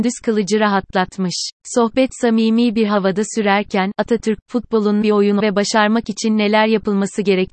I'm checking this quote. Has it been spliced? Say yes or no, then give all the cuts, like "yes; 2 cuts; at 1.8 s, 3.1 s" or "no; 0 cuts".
yes; 3 cuts; at 1.6 s, 5.0 s, 5.4 s